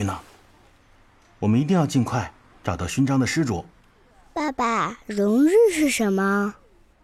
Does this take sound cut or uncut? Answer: uncut